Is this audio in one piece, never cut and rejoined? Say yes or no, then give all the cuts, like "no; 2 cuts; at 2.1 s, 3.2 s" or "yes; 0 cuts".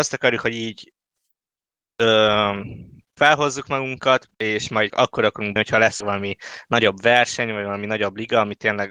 no; 5 cuts; at 3.2 s, 4.3 s, 4.9 s, 5.6 s, 6.0 s